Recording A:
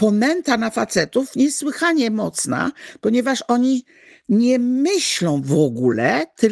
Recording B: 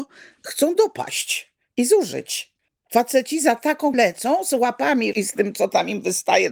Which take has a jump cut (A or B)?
B